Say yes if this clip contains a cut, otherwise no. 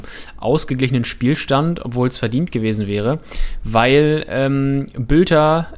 no